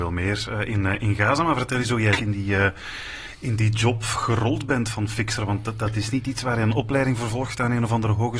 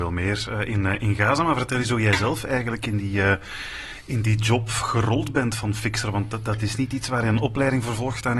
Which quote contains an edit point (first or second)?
first